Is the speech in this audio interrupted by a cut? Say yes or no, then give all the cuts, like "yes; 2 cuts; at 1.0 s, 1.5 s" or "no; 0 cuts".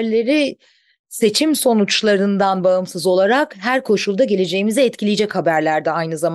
no; 0 cuts